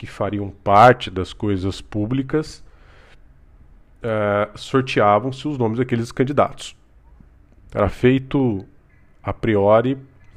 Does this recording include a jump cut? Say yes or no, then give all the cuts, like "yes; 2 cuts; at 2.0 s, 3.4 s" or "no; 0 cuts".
no; 0 cuts